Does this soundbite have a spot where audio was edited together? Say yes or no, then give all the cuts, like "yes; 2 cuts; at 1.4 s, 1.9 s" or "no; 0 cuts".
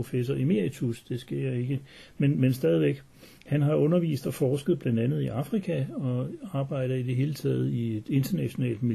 no; 0 cuts